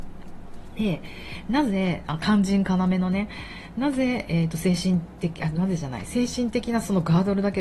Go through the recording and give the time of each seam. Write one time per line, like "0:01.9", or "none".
none